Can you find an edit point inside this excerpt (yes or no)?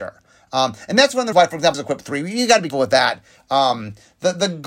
yes